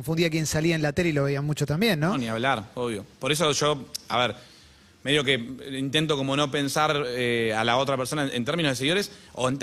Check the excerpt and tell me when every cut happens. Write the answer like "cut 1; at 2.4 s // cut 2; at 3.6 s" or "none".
none